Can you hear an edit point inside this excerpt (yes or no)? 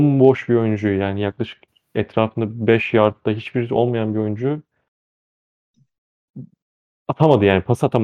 no